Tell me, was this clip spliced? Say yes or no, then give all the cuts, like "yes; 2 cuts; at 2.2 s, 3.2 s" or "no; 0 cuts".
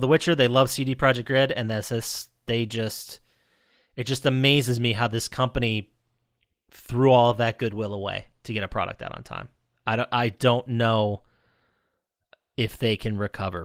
no; 0 cuts